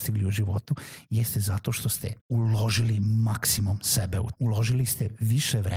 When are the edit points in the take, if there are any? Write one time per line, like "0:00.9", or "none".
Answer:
0:02.2
0:04.3